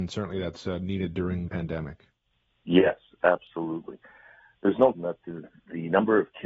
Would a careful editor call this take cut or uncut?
cut